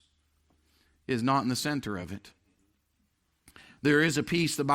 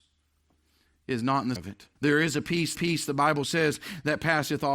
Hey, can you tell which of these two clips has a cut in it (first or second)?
second